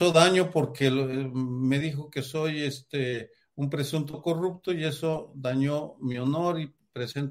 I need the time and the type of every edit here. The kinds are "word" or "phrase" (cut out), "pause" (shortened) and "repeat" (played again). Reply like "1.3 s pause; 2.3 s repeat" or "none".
none